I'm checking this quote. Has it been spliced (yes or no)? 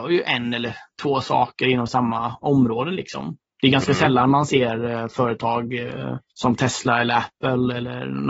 yes